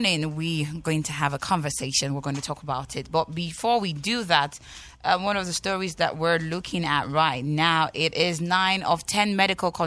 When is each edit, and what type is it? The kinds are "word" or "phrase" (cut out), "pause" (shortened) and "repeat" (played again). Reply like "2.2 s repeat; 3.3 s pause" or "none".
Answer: none

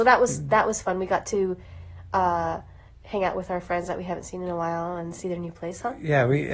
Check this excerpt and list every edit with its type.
none

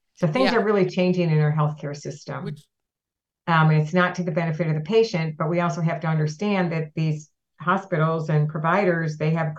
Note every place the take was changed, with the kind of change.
none

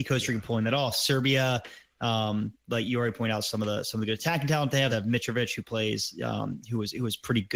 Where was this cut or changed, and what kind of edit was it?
4.9 s word

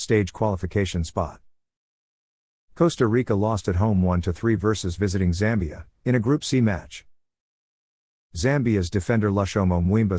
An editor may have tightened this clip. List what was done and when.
none

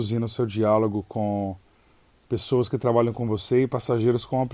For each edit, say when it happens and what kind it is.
none

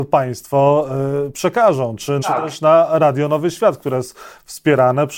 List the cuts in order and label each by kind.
2.2 s phrase

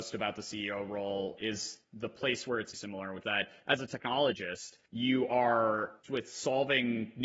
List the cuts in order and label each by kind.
1.4 s word; 2.7 s word; 3.2 s word; 4.9 s pause; 6.0 s word

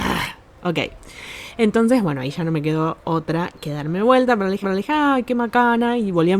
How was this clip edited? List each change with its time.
4.6 s repeat

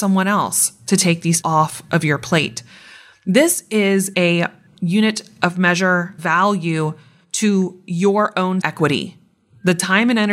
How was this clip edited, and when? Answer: 1.4 s word; 4.1 s word; 6.2 s word; 8.6 s word

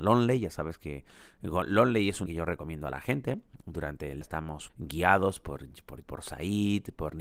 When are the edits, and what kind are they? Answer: 2.3 s word; 4.2 s word; 4.7 s word; 6.0 s word

